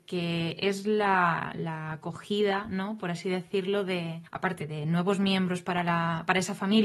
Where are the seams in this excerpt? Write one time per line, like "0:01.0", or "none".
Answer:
0:04.3